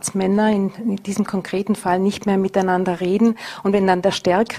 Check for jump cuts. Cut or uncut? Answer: uncut